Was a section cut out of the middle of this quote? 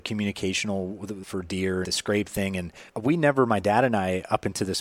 yes; 3 cuts; at 1.2 s, 1.8 s, 2.9 s

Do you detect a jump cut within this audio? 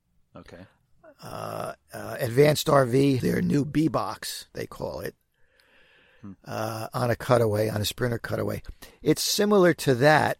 yes; 1 cut; at 3.2 s

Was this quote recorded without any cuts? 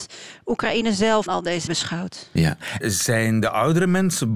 no; 3 cuts; at 1.3 s, 1.7 s, 2.8 s

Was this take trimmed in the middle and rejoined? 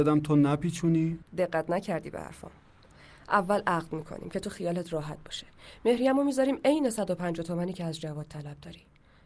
yes; 1 cut; at 1.3 s

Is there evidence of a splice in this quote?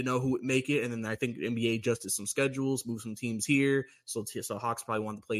no; 0 cuts

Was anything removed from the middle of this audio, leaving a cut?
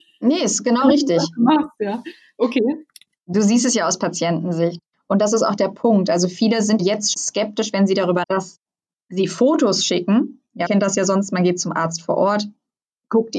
yes; 4 cuts; at 6.8 s, 7.1 s, 8.2 s, 10.6 s

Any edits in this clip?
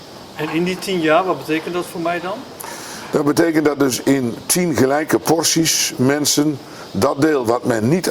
no; 0 cuts

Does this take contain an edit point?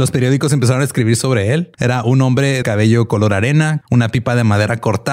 yes; 3 cuts; at 1.7 s, 2.6 s, 3.8 s

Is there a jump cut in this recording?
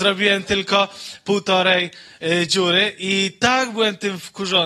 no; 0 cuts

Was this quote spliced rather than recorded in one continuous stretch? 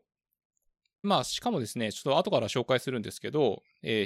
yes; 1 cut; at 1.0 s

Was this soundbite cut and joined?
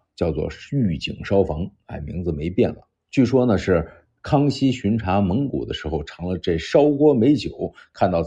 no; 0 cuts

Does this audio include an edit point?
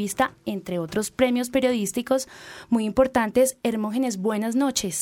no; 0 cuts

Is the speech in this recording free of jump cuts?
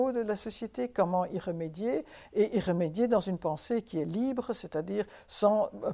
yes; 0 cuts

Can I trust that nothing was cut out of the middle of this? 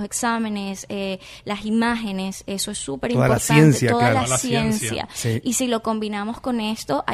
yes; 0 cuts

